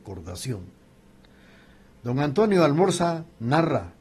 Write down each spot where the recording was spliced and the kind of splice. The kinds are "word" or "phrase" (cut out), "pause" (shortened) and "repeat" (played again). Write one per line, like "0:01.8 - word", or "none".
none